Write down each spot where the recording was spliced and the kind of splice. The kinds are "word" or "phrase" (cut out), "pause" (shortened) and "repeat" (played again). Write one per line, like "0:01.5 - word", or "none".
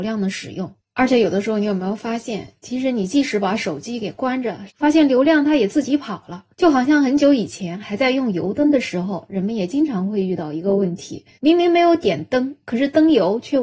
0:04.7 - phrase
0:06.5 - pause
0:11.3 - pause